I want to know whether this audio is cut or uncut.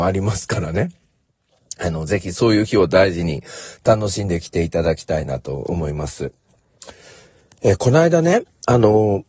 uncut